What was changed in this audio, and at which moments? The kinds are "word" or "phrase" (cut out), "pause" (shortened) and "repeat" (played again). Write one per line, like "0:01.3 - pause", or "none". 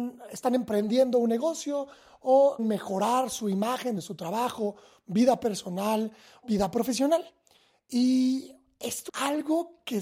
0:02.6 - word
0:04.0 - word
0:06.4 - word
0:09.1 - word